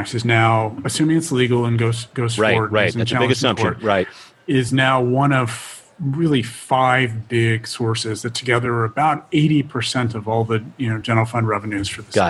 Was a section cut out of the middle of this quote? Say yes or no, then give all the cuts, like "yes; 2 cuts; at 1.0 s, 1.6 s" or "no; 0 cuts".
no; 0 cuts